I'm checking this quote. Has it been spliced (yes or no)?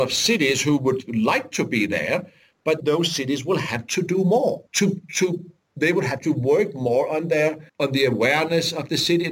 yes